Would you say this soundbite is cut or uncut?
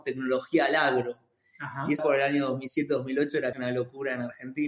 cut